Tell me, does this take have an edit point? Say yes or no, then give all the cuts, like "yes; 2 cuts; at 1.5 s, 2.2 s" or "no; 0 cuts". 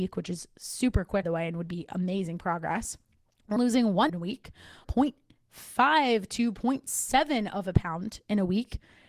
yes; 4 cuts; at 1.2 s, 3.6 s, 4.1 s, 4.8 s